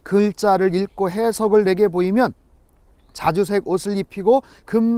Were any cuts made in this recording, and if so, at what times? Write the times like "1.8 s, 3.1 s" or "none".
none